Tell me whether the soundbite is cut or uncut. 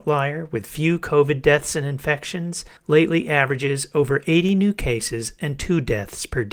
cut